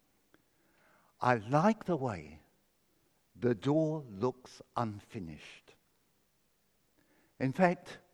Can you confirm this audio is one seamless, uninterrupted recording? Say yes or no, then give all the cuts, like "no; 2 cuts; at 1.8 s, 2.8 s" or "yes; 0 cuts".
yes; 0 cuts